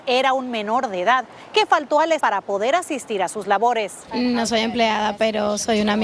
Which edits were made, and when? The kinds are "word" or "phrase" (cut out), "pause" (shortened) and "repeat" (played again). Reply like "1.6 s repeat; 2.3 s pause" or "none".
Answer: 2.2 s word